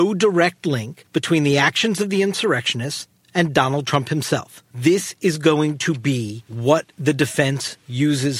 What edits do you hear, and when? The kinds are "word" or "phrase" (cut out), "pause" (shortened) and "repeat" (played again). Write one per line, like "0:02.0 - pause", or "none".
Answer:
none